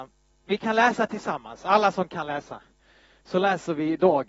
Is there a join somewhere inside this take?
no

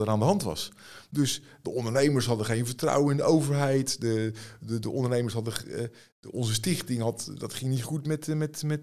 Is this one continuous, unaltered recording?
yes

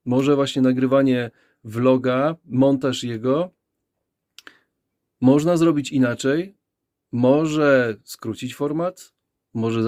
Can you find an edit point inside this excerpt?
no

